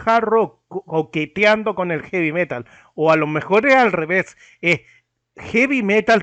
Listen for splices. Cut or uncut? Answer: uncut